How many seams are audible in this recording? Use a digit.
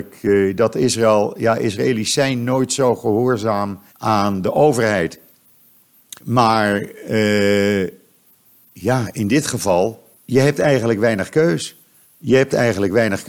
4